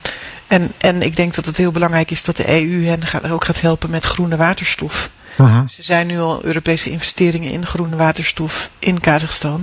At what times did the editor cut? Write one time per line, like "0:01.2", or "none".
none